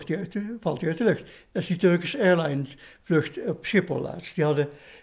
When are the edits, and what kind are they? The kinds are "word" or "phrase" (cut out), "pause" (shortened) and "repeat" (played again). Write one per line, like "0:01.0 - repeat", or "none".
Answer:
none

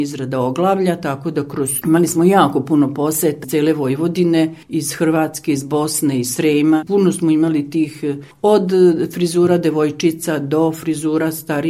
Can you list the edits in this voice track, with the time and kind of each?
0:01.8 - word
0:03.4 - word
0:04.6 - pause
0:08.3 - pause

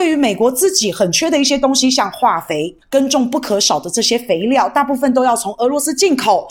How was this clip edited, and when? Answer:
0:02.8 - pause

